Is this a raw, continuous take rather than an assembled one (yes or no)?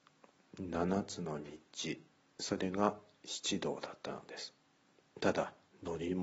yes